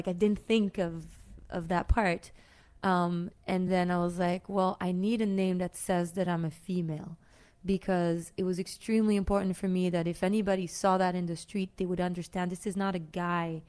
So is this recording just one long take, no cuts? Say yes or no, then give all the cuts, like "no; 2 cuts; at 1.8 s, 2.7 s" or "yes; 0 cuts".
yes; 0 cuts